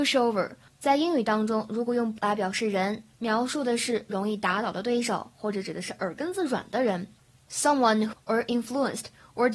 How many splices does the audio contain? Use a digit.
3